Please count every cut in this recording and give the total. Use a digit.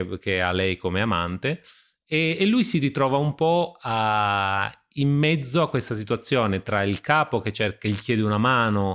0